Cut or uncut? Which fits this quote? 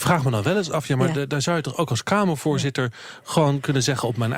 uncut